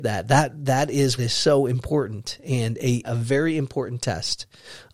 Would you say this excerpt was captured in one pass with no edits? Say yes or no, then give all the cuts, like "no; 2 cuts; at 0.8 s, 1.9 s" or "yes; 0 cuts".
no; 2 cuts; at 1.2 s, 3.0 s